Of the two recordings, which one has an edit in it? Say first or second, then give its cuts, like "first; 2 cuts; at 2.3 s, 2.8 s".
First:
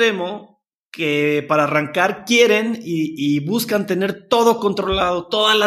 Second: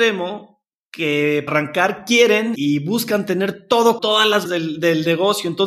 second; 4 cuts; at 1.5 s, 2.6 s, 4.0 s, 4.5 s